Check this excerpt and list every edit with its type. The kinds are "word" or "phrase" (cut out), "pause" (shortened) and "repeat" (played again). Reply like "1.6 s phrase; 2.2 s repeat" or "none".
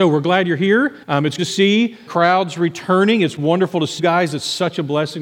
1.0 s pause; 1.4 s word; 2.1 s word; 4.0 s word